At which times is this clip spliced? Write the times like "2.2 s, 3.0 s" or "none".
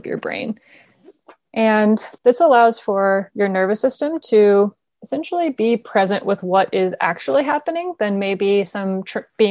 2.2 s, 4.9 s